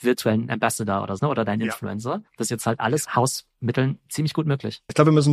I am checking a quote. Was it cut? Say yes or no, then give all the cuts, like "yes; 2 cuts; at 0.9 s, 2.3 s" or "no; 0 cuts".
yes; 3 cuts; at 1.2 s, 2.3 s, 3.0 s